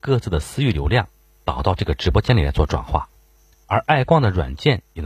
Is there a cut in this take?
no; 0 cuts

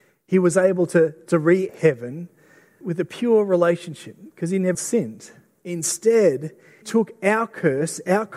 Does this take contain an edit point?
yes; 4 cuts; at 1.7 s, 2.8 s, 4.7 s, 6.8 s

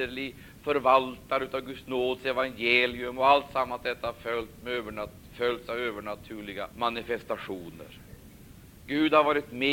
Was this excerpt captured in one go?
no; 1 cut; at 6.7 s

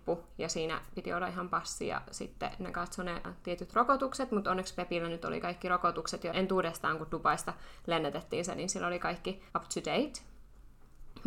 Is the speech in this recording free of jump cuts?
no; 2 cuts; at 6.3 s, 9.5 s

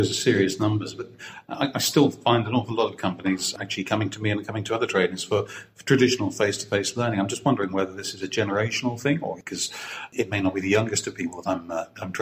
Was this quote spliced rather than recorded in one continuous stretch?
no; 0 cuts

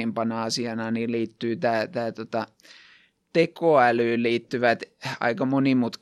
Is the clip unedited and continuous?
yes; 0 cuts

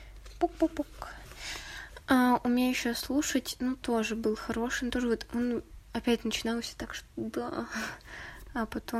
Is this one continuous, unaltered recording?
yes; 0 cuts

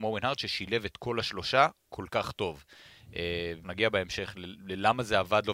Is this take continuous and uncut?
no; 1 cut; at 3.6 s

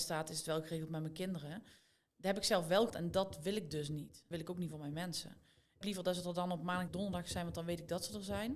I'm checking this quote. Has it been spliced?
yes; 4 cuts; at 2.9 s, 4.3 s, 5.8 s, 6.9 s

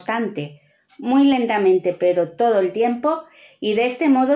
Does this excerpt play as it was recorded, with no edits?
yes; 0 cuts

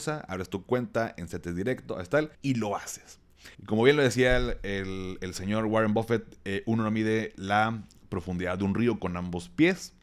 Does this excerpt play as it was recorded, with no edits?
no; 2 cuts; at 2.3 s, 3.5 s

